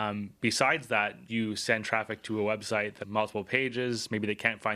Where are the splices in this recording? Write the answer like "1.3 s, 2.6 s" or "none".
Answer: 1.3 s, 3.0 s